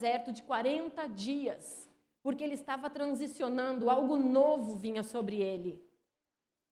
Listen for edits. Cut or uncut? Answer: uncut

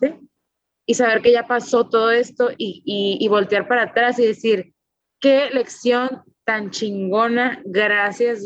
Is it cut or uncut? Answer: uncut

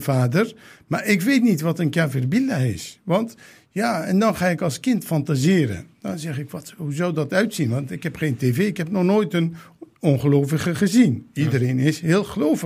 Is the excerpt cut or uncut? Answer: uncut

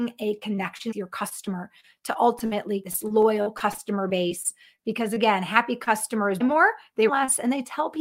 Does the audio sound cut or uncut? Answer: cut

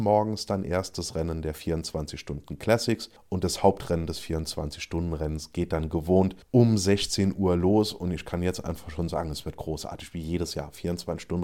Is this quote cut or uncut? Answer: cut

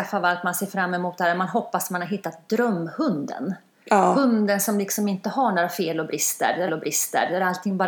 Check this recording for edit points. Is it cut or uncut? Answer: cut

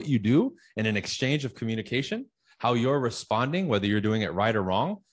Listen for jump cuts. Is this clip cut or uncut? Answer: uncut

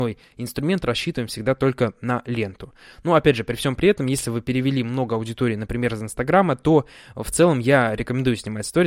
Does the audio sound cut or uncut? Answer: uncut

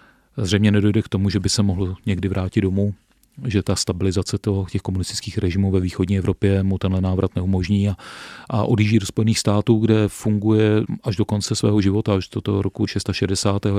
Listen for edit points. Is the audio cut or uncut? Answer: uncut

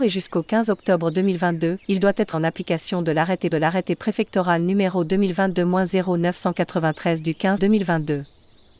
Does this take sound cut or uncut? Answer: cut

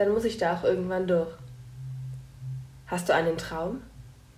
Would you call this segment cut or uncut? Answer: uncut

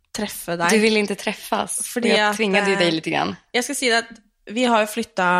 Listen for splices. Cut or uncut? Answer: uncut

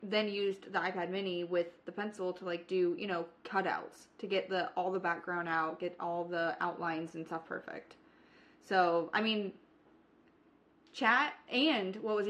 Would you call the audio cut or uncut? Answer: uncut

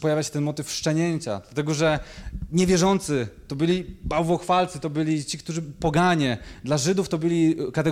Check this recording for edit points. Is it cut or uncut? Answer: uncut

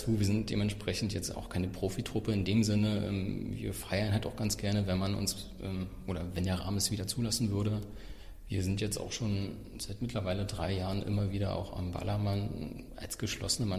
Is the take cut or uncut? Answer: uncut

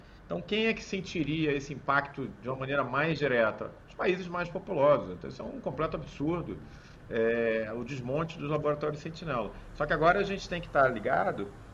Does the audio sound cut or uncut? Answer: uncut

